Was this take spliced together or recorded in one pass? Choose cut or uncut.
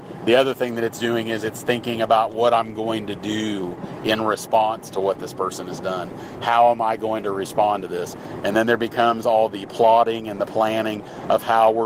uncut